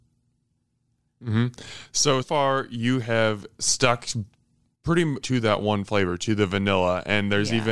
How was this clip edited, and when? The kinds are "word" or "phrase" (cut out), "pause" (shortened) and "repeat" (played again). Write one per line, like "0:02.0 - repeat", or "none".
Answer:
0:02.2 - word
0:05.2 - word